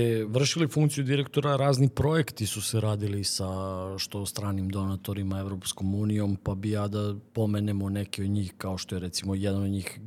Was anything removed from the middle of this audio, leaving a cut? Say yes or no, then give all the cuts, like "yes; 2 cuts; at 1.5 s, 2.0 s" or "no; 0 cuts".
no; 0 cuts